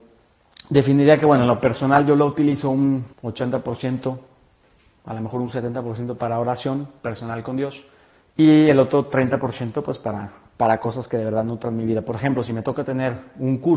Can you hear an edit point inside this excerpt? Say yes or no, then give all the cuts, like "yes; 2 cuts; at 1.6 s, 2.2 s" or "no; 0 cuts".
yes; 2 cuts; at 3.1 s, 8.2 s